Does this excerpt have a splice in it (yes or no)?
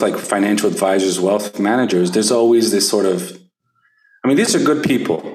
no